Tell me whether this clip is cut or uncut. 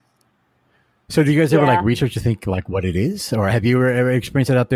uncut